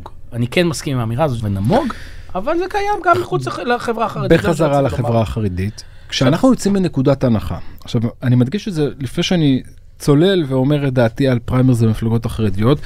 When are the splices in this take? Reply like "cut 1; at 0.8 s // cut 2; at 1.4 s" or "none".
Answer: cut 1; at 1.4 s